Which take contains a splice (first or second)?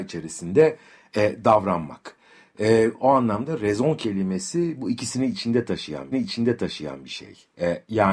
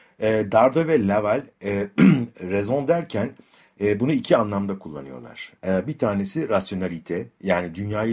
first